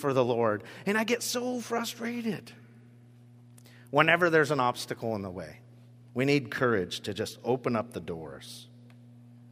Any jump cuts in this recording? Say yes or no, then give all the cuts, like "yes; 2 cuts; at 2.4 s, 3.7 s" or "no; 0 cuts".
no; 0 cuts